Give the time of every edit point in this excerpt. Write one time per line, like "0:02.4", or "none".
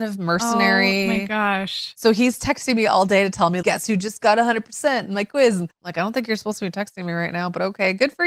0:03.6
0:05.7